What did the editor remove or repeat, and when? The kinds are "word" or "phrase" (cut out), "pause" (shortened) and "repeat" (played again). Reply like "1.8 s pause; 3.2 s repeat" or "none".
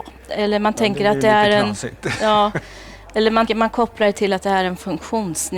3.5 s word